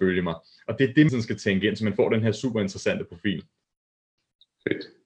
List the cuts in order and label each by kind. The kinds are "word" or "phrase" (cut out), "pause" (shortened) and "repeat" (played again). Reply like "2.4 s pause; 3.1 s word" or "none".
1.1 s phrase